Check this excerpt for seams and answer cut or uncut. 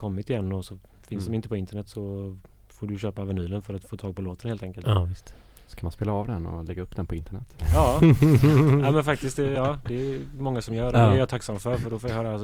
uncut